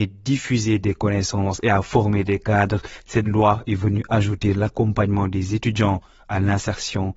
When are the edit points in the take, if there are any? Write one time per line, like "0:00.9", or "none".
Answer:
none